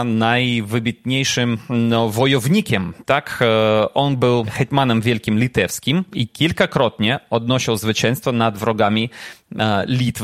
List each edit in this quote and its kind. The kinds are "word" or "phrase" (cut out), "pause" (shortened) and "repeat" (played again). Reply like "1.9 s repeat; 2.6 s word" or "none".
none